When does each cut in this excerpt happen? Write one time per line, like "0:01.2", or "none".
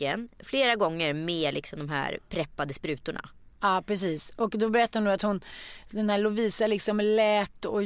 none